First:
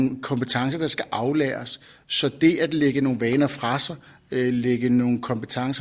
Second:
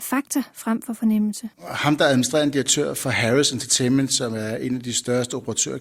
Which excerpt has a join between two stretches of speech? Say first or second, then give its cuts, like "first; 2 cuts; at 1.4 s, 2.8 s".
second; 1 cut; at 1.5 s